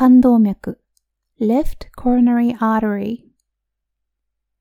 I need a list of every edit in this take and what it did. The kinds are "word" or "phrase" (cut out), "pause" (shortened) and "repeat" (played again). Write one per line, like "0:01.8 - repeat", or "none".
none